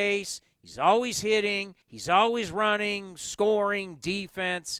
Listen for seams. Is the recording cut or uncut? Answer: cut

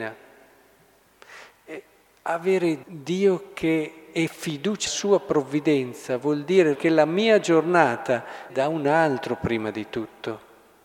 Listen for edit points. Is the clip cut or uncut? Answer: cut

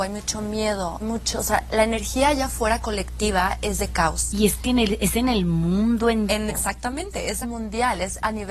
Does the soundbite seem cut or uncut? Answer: cut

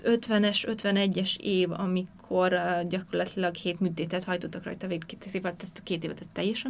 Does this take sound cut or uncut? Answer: uncut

